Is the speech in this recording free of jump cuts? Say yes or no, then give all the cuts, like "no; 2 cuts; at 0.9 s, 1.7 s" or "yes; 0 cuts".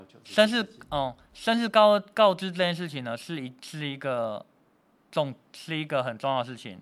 yes; 0 cuts